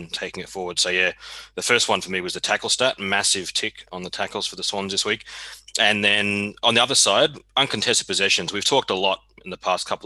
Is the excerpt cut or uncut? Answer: uncut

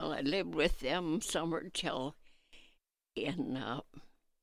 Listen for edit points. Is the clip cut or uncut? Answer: cut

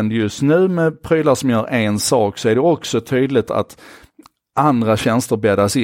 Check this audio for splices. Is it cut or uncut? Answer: cut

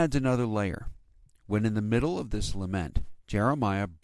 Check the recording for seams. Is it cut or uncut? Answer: uncut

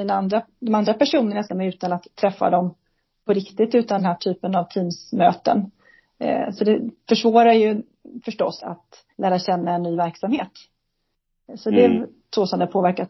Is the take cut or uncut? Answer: cut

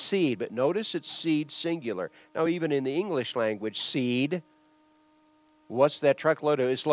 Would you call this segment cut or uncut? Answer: uncut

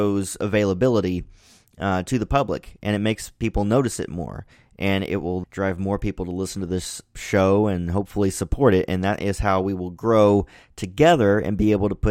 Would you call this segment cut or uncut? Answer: cut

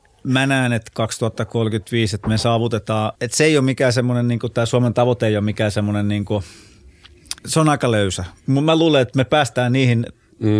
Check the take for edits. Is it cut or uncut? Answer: cut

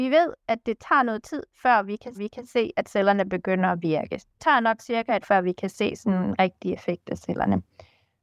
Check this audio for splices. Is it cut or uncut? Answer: cut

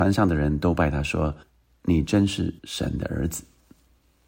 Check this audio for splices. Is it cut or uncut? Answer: cut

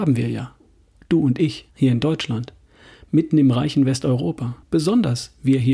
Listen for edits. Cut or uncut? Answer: cut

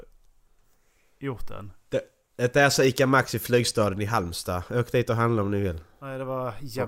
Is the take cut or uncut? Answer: uncut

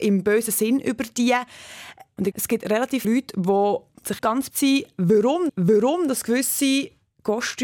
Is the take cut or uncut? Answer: cut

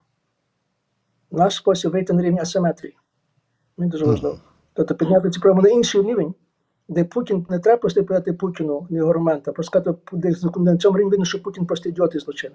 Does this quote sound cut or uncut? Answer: uncut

